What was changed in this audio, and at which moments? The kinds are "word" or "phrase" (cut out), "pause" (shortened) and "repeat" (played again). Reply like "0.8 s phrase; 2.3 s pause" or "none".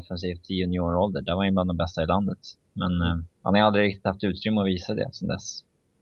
3.3 s pause